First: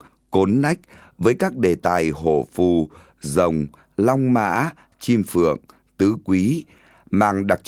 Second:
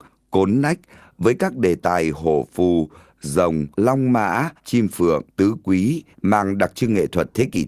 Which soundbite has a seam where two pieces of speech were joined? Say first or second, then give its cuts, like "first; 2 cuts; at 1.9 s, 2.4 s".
second; 4 cuts; at 3.7 s, 4.6 s, 5.3 s, 6.1 s